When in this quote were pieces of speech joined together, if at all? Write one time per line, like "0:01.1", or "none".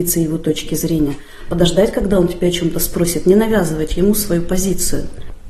none